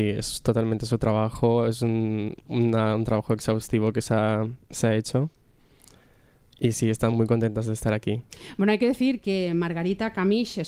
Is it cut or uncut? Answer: uncut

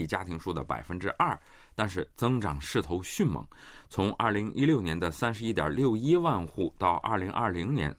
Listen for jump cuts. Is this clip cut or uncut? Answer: uncut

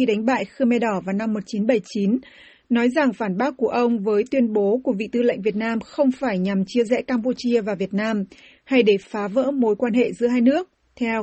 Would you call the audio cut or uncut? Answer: uncut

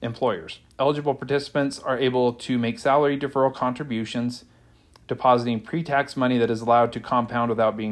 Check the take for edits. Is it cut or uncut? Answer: uncut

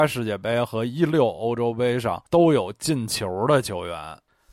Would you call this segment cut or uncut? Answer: cut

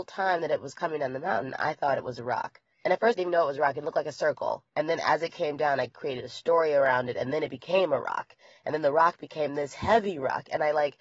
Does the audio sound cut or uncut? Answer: cut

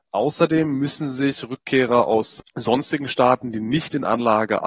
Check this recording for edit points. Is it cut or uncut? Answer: uncut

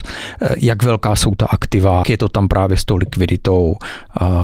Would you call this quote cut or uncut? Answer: cut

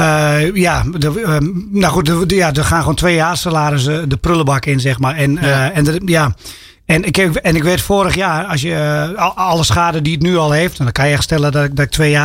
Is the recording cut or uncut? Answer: uncut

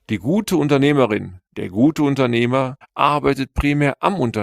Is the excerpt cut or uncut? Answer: cut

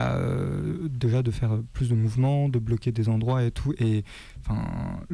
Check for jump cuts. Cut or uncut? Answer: uncut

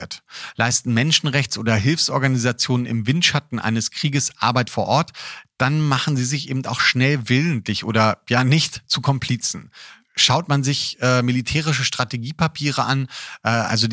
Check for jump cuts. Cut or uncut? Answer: cut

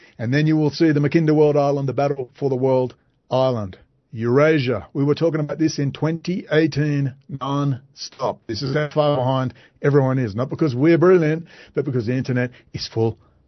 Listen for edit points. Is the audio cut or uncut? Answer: uncut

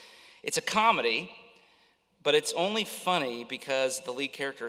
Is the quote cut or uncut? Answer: uncut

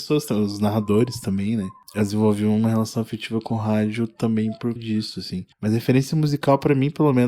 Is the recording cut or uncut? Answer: cut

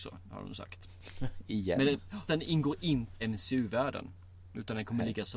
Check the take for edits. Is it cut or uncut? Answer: cut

